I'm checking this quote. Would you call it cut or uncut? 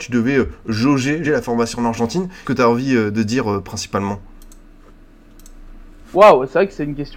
cut